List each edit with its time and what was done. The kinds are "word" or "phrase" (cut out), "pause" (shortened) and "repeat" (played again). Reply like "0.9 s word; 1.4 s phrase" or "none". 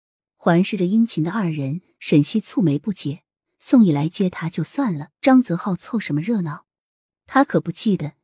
5.1 s pause